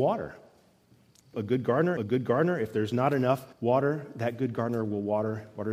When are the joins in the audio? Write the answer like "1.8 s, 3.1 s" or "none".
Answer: 1.3 s, 2.0 s, 3.5 s